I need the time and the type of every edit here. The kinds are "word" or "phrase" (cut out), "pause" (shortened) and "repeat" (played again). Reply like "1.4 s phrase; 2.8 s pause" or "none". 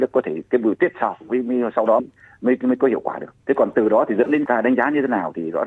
2.0 s word; 3.4 s pause; 4.5 s phrase